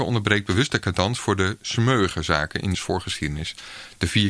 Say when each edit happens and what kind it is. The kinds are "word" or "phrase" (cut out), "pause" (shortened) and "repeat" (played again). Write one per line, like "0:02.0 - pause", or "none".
0:02.7 - word